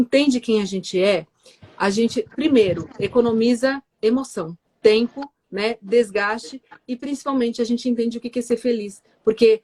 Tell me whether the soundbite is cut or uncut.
cut